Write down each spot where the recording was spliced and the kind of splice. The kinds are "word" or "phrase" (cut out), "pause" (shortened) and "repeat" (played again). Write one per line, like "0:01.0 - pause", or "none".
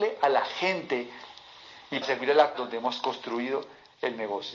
0:02.0 - word
0:02.5 - word